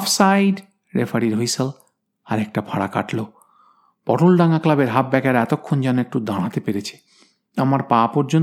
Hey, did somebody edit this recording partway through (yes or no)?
no